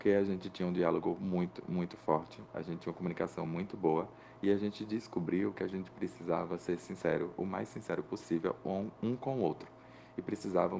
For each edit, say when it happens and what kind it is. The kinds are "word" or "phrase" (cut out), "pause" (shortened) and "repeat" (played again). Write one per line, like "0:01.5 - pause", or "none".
none